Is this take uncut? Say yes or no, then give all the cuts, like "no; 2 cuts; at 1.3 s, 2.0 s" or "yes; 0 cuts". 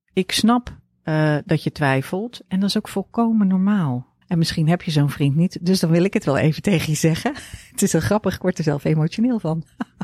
no; 1 cut; at 4.2 s